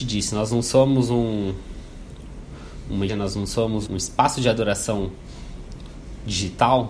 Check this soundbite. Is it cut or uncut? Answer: cut